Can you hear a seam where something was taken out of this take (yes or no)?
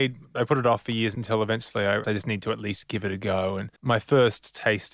yes